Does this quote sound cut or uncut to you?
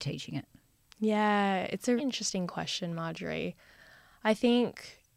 cut